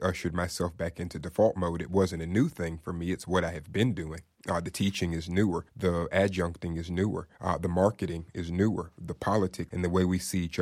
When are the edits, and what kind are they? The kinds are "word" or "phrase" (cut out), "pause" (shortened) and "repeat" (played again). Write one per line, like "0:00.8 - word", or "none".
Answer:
0:04.3 - pause
0:05.7 - pause
0:07.3 - pause
0:09.7 - phrase